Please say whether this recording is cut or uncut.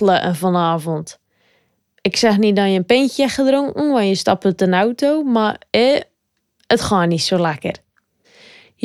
uncut